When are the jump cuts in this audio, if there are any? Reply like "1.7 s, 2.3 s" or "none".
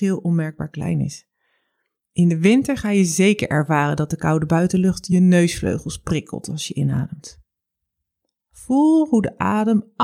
none